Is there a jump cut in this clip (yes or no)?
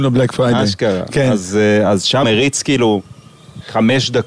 yes